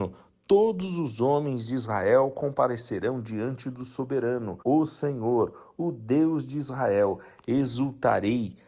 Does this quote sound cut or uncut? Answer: cut